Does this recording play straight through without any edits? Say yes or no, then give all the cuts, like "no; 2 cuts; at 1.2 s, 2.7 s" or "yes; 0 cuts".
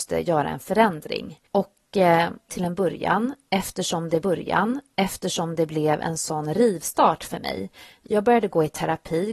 no; 3 cuts; at 1.5 s, 2.5 s, 4.2 s